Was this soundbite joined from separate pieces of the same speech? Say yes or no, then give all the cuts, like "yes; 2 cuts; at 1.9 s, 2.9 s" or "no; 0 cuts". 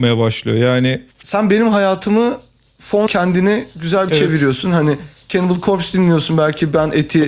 yes; 3 cuts; at 1.1 s, 3.1 s, 4.1 s